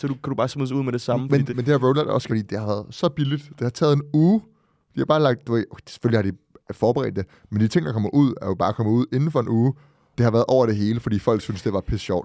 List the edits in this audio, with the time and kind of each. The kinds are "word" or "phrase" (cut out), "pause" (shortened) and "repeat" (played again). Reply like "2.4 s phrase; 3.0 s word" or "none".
1.5 s word; 2.3 s word; 10.1 s word